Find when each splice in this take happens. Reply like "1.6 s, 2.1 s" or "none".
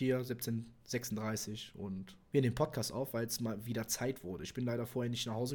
2.3 s